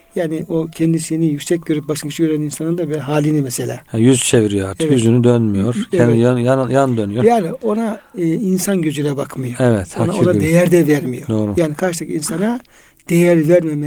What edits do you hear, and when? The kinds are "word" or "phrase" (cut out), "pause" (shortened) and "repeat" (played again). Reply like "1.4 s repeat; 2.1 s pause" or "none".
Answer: none